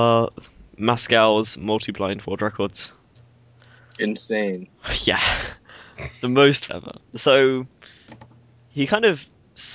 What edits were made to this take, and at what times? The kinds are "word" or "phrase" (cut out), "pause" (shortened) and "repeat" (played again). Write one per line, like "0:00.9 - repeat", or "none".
0:06.7 - phrase